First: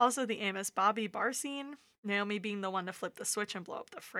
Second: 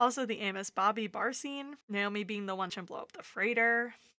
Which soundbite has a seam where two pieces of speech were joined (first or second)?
second